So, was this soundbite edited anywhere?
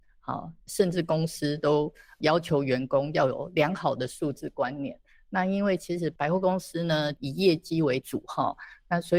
no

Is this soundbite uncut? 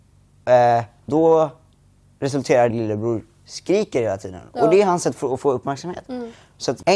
no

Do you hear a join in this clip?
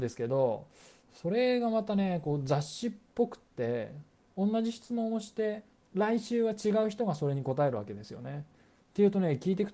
no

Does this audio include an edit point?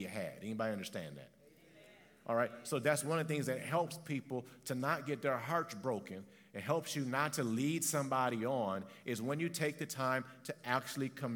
no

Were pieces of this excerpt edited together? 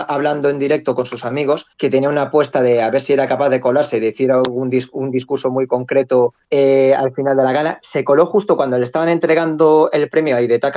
no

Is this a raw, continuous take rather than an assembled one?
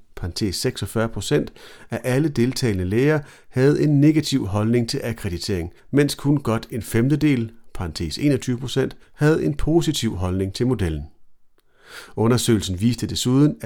no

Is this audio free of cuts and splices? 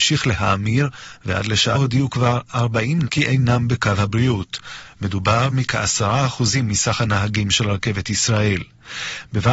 no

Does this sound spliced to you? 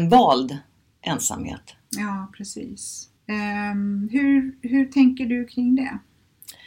yes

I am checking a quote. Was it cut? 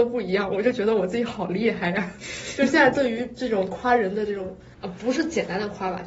yes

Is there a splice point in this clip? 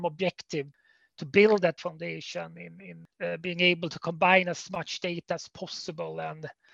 yes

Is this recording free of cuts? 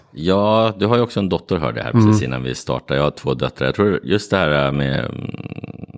yes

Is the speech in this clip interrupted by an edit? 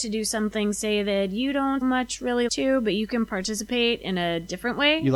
yes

